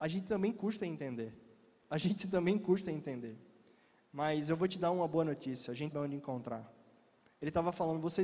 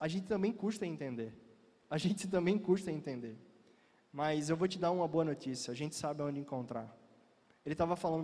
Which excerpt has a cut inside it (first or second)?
first